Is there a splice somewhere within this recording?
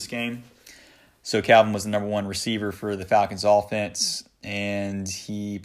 no; 0 cuts

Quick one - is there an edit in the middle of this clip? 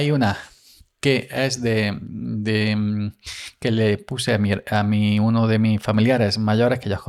no; 0 cuts

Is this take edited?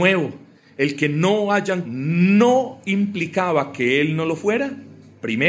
yes; 1 cut; at 1.8 s

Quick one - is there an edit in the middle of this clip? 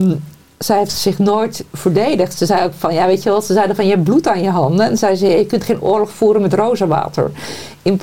no; 0 cuts

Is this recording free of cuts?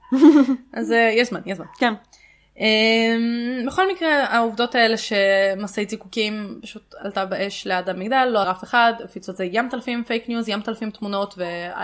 no; 1 cut; at 8.4 s

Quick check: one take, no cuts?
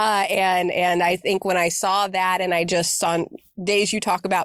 no; 1 cut; at 3.0 s

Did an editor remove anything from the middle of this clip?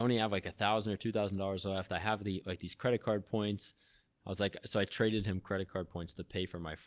no; 0 cuts

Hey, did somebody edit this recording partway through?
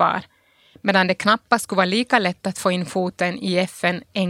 no; 0 cuts

